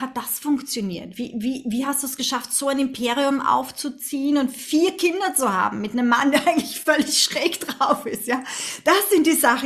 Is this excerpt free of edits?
yes; 0 cuts

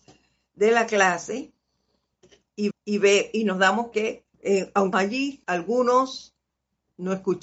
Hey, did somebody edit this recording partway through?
yes; 5 cuts; at 2.7 s, 3.9 s, 4.3 s, 4.9 s, 5.4 s

